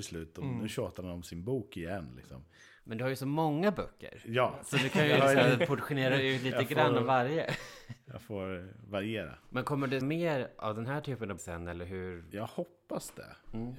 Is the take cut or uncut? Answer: cut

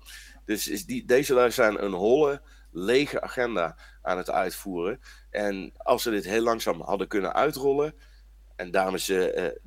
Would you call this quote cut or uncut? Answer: cut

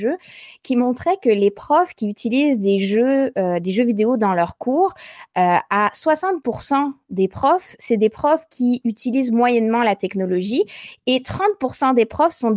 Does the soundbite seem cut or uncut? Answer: uncut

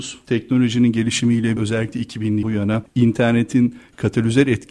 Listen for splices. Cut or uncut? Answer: cut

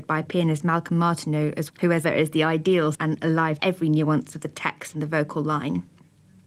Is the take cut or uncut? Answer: cut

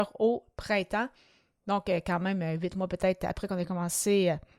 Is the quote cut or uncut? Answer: uncut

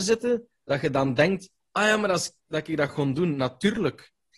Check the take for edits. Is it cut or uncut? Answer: cut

